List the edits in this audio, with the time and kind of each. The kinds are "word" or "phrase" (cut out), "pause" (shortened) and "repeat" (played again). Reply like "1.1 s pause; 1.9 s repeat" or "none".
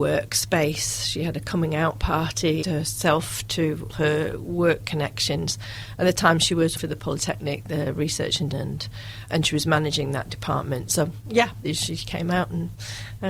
2.6 s phrase; 3.9 s word; 6.8 s word; 8.5 s phrase; 9.3 s word; 11.6 s word